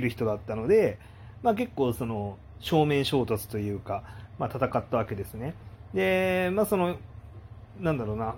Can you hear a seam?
no; 0 cuts

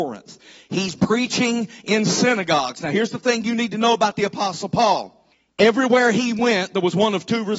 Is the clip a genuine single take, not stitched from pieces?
no; 2 cuts; at 1.0 s, 5.3 s

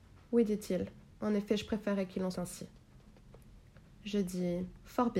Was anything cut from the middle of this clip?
yes; 1 cut; at 2.3 s

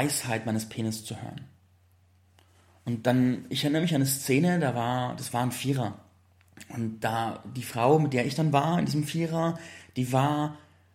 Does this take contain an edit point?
no; 0 cuts

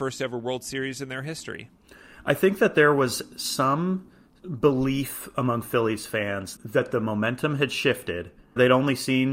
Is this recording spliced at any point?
no; 0 cuts

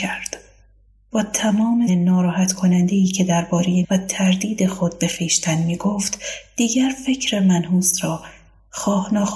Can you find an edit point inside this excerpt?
yes; 2 cuts; at 1.9 s, 3.8 s

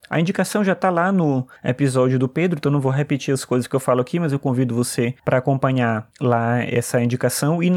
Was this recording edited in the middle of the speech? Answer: yes; 3 cuts; at 1.6 s, 5.2 s, 6.1 s

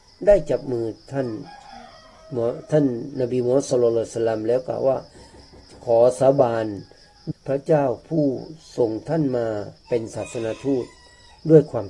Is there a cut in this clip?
yes; 2 cuts; at 7.3 s, 9.8 s

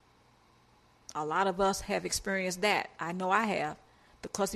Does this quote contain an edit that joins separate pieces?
no; 0 cuts

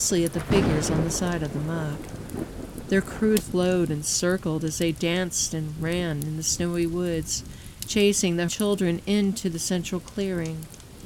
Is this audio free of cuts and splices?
no; 2 cuts; at 3.4 s, 8.5 s

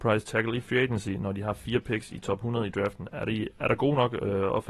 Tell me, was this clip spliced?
no; 0 cuts

